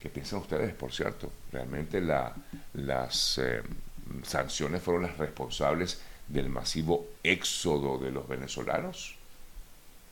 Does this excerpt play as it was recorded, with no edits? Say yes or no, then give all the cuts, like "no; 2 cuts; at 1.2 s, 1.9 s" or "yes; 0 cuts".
yes; 0 cuts